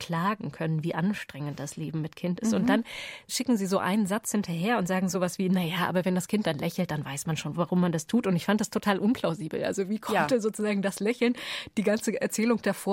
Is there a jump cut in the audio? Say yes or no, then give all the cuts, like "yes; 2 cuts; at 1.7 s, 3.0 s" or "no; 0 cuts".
no; 0 cuts